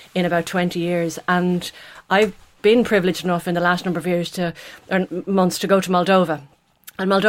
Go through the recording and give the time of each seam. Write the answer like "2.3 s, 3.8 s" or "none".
none